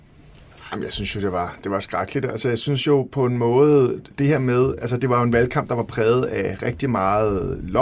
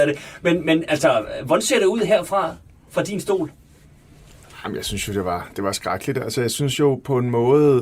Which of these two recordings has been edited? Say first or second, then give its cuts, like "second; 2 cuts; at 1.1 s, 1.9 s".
first; 1 cut; at 4.1 s